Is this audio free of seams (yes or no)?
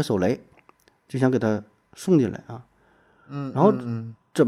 yes